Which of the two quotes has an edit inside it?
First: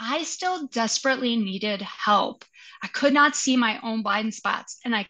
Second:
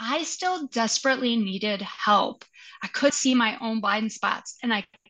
second; 1 cut; at 3.1 s

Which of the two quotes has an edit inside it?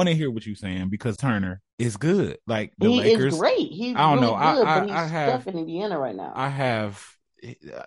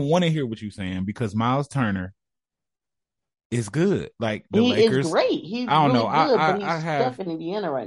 first; 2 cuts; at 1.2 s, 1.7 s

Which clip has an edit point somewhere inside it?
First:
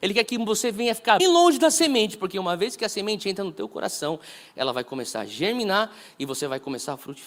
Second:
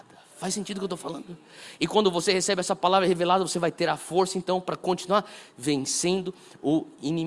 first; 1 cut; at 1.2 s

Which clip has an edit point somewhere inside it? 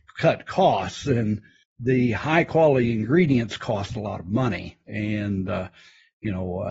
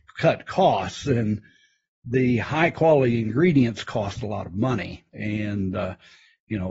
first; 1 cut; at 1.6 s

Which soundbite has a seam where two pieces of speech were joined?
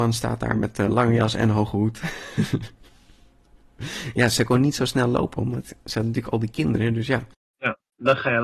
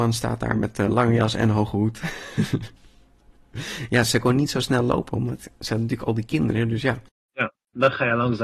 second; 1 cut; at 2.8 s

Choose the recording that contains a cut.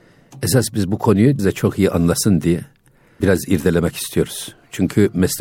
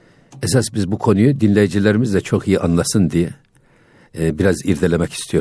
first; 2 cuts; at 1.4 s, 3.2 s

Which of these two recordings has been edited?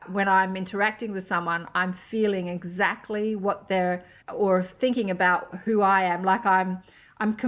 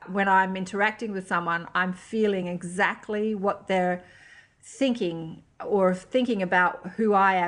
first; 1 cut; at 4.2 s

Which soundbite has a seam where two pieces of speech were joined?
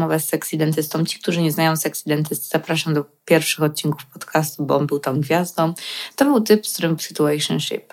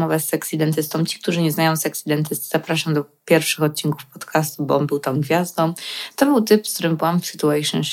first; 1 cut; at 7.0 s

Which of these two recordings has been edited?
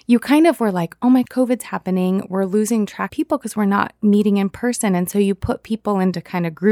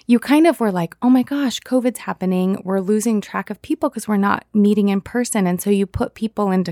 first; 2 cuts; at 1.3 s, 3.1 s

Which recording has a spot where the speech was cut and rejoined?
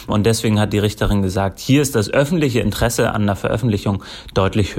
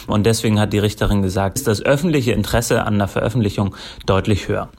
second; 1 cut; at 1.6 s

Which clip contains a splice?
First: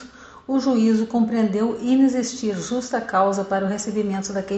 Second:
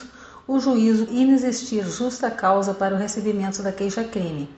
second; 1 cut; at 1.1 s

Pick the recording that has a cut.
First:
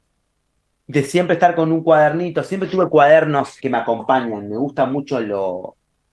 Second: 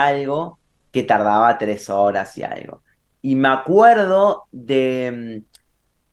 first; 1 cut; at 3.6 s

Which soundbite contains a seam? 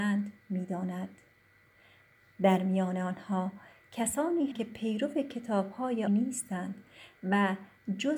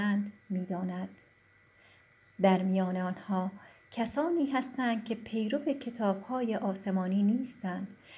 first; 2 cuts; at 4.5 s, 6.1 s

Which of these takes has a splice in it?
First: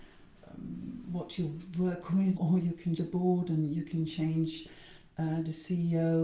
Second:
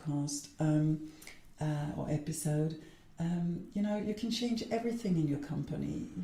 first; 2 cuts; at 2.4 s, 3.0 s

